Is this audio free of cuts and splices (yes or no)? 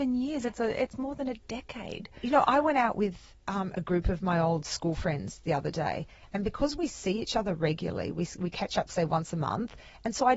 no